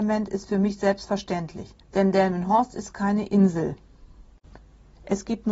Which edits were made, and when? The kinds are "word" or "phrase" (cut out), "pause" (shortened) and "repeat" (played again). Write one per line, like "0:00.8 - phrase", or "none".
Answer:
0:01.8 - pause